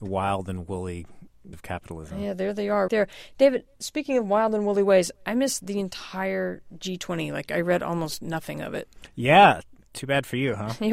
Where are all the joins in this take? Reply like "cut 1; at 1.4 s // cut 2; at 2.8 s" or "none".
cut 1; at 1.5 s // cut 2; at 2.9 s